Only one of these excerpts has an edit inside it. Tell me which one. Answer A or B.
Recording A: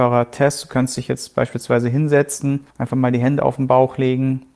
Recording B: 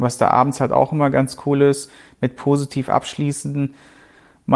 A